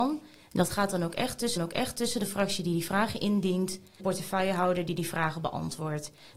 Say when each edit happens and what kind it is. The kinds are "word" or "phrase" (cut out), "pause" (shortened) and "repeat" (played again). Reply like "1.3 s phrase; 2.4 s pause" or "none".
1.6 s repeat; 4.0 s phrase